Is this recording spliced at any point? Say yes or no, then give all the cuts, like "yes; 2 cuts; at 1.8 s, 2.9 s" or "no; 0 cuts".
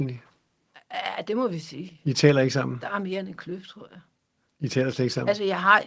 no; 0 cuts